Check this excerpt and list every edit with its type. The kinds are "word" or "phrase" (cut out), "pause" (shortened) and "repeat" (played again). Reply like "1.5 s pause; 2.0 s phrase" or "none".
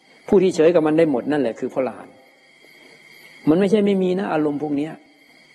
none